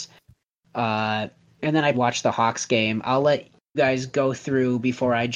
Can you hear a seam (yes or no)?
yes